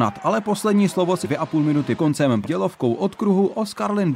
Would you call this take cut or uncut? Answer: cut